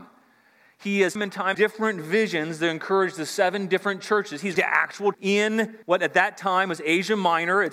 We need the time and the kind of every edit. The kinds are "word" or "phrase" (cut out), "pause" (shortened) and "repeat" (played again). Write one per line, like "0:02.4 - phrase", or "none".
0:01.2 - word
0:01.5 - phrase
0:04.6 - word
0:05.1 - word
0:05.8 - pause